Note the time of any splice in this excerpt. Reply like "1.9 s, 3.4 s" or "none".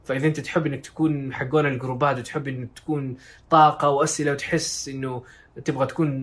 none